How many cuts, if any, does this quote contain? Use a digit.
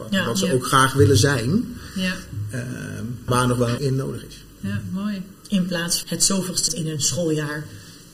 4